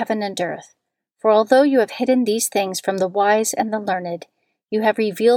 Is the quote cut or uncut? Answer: uncut